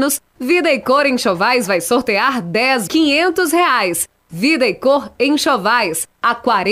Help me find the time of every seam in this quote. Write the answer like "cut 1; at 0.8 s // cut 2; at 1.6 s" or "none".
cut 1; at 2.9 s